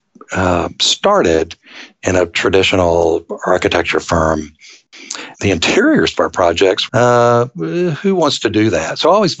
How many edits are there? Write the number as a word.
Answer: three